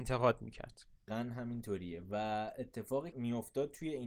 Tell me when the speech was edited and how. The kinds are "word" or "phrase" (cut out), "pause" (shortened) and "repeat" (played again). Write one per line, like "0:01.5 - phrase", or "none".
0:01.1 - word
0:03.1 - word